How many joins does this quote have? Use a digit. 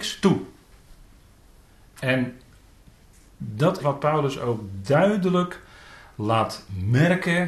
1